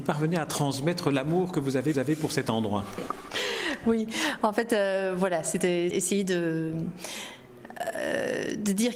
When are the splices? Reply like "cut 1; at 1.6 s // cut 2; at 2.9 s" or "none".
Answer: cut 1; at 1.9 s // cut 2; at 5.9 s